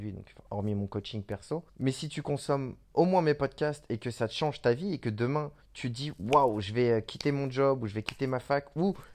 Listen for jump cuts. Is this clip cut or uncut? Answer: cut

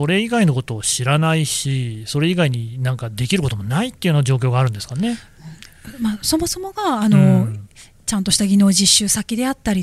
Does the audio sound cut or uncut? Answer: uncut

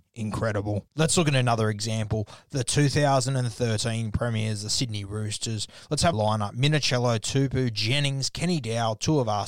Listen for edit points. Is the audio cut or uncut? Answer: cut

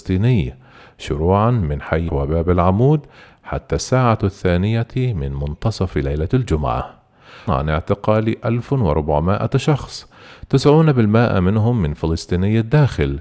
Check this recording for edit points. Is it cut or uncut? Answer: cut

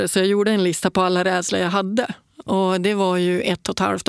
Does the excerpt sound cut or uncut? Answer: uncut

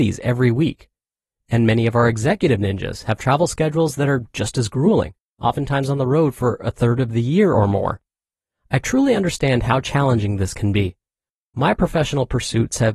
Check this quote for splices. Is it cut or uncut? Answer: uncut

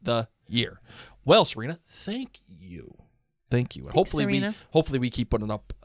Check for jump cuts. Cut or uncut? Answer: uncut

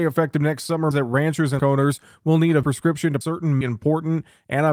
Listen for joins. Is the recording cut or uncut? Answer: cut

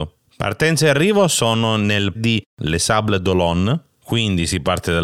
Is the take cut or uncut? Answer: cut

